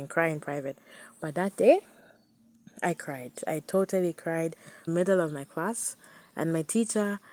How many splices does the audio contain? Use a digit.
1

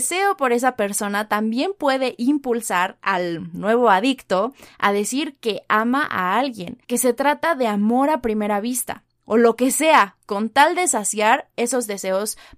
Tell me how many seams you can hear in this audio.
1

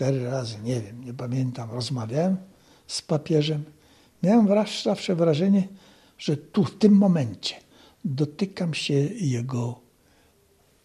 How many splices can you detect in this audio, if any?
0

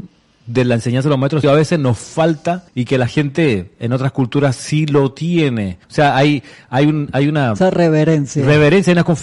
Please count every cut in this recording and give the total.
3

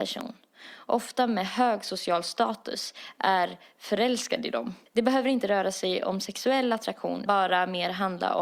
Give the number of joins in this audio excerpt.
2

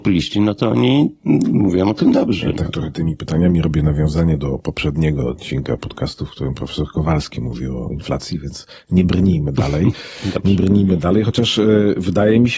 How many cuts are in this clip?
0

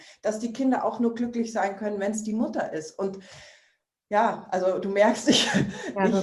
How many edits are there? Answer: 0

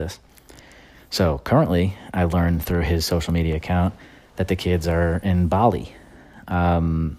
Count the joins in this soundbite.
0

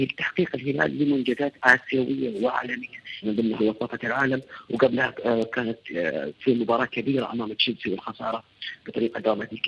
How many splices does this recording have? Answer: 2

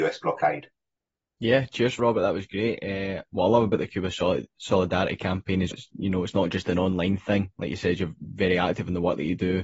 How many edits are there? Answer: 2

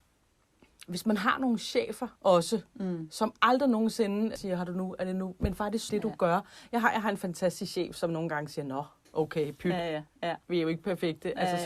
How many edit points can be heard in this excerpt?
5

